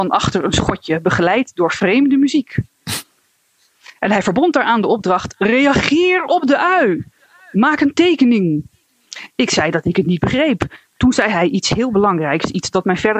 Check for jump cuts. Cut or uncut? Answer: uncut